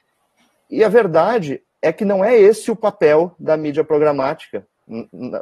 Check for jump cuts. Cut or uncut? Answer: uncut